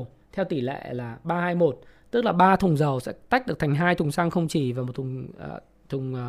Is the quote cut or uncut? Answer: uncut